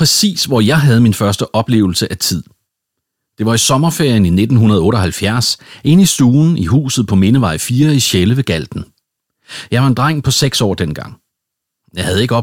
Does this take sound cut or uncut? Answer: uncut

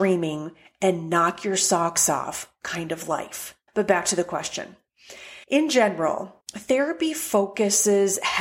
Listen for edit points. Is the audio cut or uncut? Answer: cut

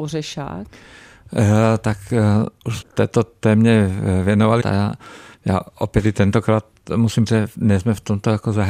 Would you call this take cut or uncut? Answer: cut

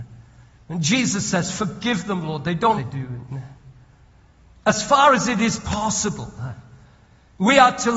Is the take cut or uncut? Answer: cut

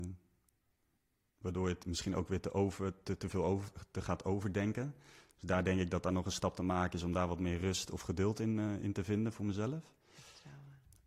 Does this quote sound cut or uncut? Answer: uncut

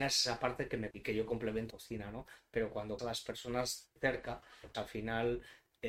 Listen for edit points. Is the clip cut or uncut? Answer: cut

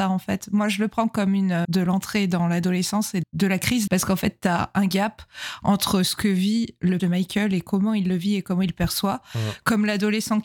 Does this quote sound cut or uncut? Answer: cut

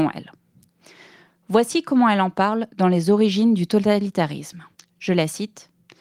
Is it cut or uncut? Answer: cut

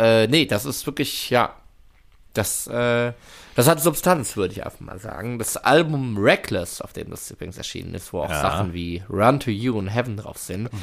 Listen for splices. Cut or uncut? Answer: uncut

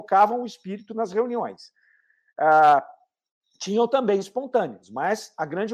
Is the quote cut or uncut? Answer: uncut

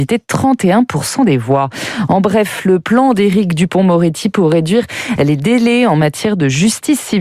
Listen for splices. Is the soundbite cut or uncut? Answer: uncut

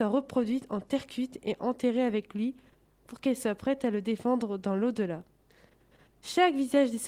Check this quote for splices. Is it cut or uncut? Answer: uncut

